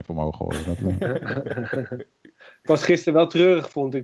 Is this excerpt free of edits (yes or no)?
yes